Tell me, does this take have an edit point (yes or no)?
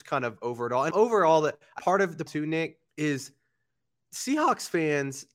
yes